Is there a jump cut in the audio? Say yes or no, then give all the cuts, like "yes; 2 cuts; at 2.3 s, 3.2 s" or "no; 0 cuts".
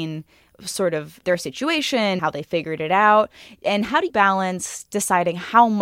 yes; 3 cuts; at 1.2 s, 2.2 s, 4.1 s